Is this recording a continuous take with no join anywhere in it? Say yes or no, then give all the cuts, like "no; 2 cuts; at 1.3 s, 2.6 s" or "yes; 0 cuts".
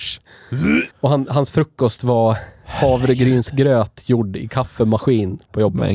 no; 1 cut; at 0.9 s